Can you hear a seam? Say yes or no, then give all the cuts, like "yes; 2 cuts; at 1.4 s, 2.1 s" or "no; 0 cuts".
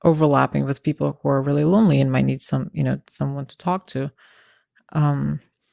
no; 0 cuts